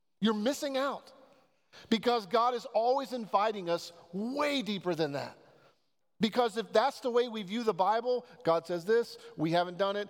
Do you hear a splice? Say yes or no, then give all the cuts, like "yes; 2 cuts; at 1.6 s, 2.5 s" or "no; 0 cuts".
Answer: no; 0 cuts